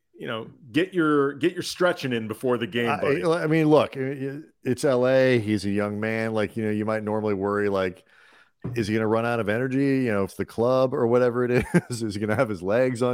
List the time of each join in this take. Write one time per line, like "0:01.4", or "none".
0:10.3